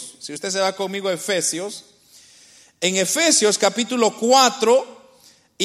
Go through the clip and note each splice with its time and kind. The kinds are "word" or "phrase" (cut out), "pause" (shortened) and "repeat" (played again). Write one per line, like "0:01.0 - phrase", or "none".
none